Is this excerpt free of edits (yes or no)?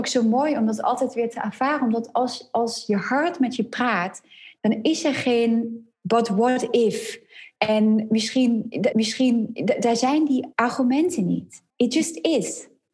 no